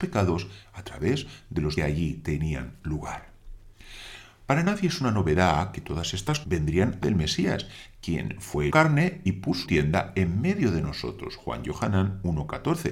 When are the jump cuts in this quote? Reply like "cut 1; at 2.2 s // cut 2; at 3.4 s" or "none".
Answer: cut 1; at 1.8 s // cut 2; at 6.4 s // cut 3; at 7.0 s // cut 4; at 8.7 s // cut 5; at 9.6 s